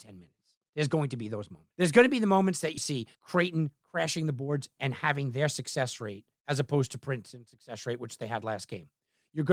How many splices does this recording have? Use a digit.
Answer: 4